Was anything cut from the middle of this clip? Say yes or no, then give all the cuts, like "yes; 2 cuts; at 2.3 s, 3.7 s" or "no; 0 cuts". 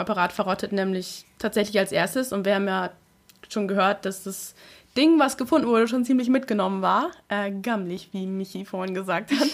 no; 0 cuts